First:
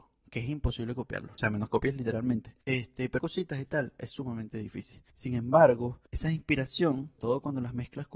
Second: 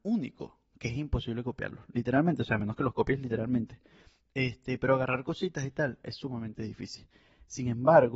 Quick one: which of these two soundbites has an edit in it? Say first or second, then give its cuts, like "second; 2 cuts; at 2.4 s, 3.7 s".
first; 7 cuts; at 1.4 s, 1.7 s, 2.6 s, 3.2 s, 5.1 s, 6.1 s, 7.2 s